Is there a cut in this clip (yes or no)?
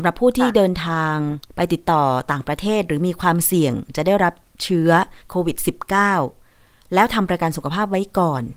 yes